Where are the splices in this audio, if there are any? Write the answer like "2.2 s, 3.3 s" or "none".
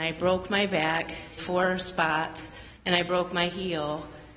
1.4 s, 2.8 s